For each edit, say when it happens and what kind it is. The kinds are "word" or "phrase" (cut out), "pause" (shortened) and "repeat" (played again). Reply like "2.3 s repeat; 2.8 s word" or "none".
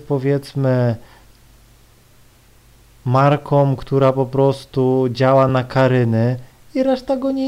none